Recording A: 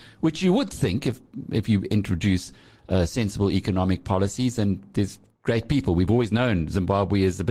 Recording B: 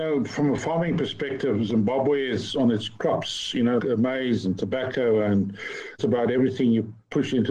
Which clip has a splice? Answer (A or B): B